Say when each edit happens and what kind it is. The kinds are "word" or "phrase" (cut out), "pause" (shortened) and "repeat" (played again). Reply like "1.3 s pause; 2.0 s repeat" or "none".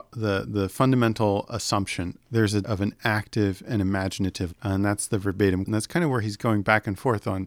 2.2 s phrase; 2.6 s word; 4.5 s word; 5.7 s word